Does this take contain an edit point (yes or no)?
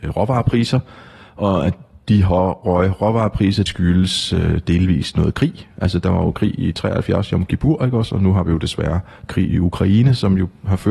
yes